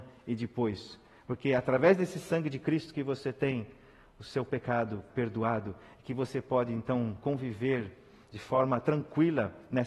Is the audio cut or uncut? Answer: cut